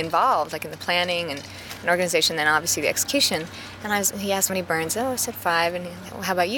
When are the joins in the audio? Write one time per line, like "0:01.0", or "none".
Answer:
0:04.5